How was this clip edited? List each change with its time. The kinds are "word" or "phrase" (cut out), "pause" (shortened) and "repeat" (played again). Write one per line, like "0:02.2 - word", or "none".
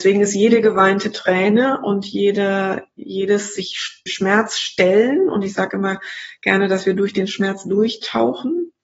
0:04.1 - word